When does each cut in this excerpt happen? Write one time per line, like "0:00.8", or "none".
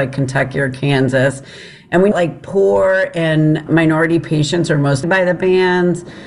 0:02.1
0:03.7
0:05.0